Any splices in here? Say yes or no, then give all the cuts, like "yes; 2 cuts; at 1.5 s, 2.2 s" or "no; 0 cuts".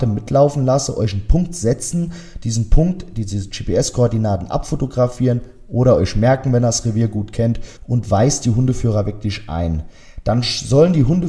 yes; 1 cut; at 7.8 s